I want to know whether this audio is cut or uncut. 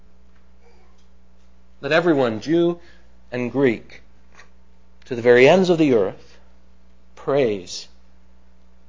uncut